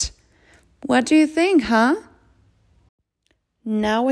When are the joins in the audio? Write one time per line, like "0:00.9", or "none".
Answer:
none

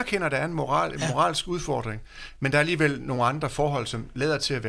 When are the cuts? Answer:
none

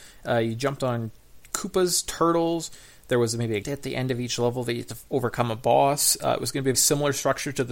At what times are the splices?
0:03.6
0:06.7

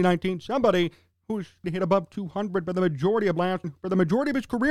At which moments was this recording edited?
0:01.1
0:01.6
0:03.6

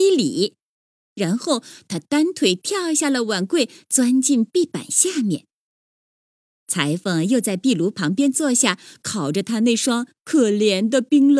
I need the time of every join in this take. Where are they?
none

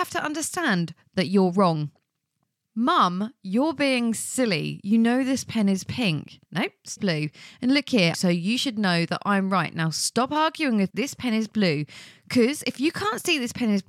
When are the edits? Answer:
0:06.4
0:07.0
0:08.1
0:10.9

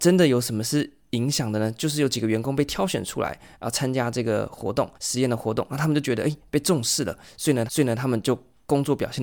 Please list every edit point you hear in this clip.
0:04.9
0:07.7

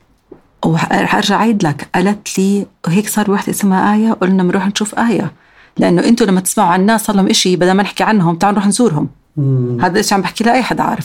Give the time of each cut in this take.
none

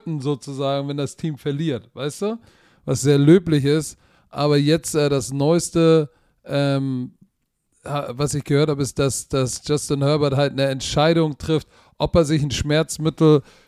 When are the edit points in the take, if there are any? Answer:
none

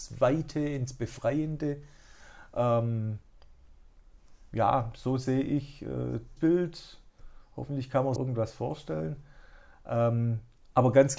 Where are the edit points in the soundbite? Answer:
0:06.4
0:08.2

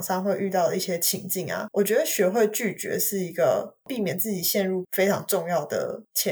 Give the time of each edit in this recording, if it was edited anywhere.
0:04.8

